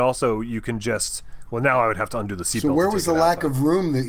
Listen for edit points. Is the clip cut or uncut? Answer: uncut